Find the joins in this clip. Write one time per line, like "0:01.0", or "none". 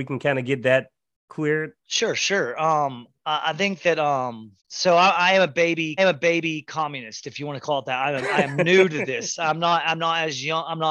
0:01.8
0:04.6
0:06.0